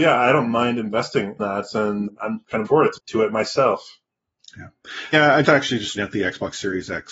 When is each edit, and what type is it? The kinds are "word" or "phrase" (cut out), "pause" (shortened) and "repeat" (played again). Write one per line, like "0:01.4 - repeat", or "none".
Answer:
0:01.4 - word
0:02.1 - word
0:02.7 - word
0:03.0 - word
0:05.1 - word
0:05.4 - word
0:06.0 - word